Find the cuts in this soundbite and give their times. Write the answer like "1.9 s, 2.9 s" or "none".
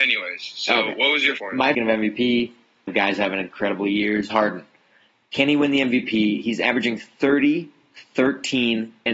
1.4 s, 1.7 s, 2.9 s, 4.3 s